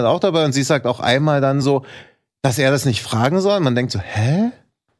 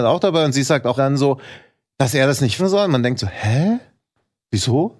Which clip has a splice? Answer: second; 2 cuts; at 1.0 s, 2.6 s

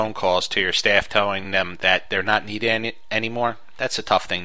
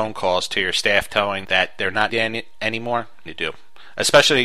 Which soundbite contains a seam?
second; 3 cuts; at 1.4 s, 2.1 s, 3.3 s

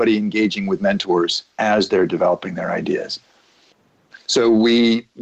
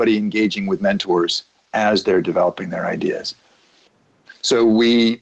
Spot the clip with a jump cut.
first; 1 cut; at 1.5 s

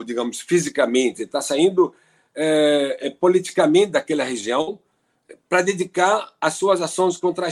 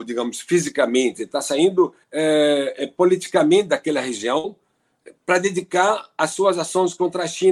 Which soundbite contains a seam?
second; 1 cut; at 2.0 s

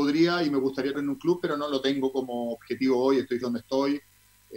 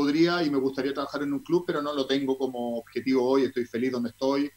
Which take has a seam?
first; 2 cuts; at 0.9 s, 3.4 s

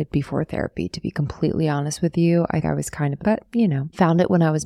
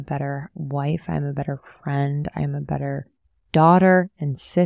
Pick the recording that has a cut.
first; 2 cuts; at 2.6 s, 3.2 s

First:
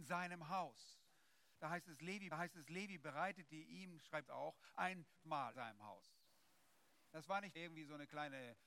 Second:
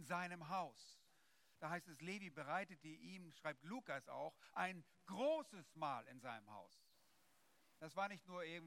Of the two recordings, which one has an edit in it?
first; 5 cuts; at 2.3 s, 4.3 s, 5.2 s, 5.5 s, 7.5 s

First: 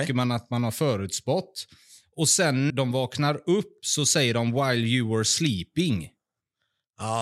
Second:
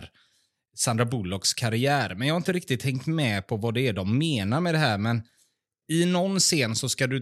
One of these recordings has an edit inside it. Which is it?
first; 1 cut; at 2.7 s

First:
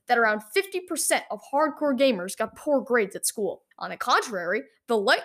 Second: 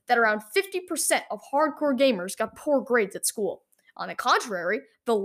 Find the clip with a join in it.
first; 1 cut; at 3.7 s

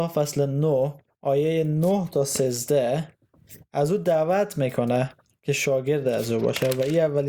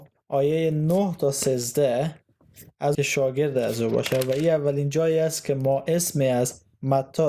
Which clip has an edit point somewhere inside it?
second; 1 cut; at 2.9 s

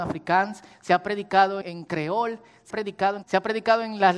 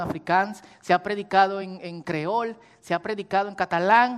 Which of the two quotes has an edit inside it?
first; 3 cuts; at 1.6 s, 2.7 s, 3.2 s

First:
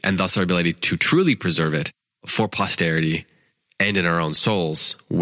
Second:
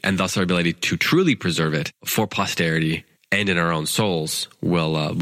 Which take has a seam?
second; 2 cuts; at 2.0 s, 3.1 s

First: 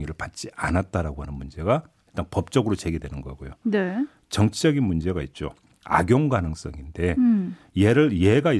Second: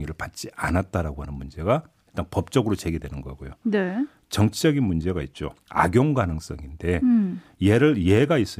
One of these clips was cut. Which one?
second; 1 cut; at 5.6 s

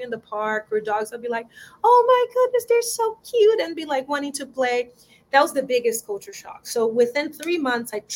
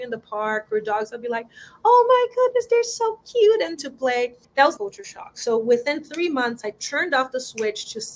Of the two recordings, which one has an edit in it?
second; 3 cuts; at 3.8 s, 4.4 s, 4.8 s

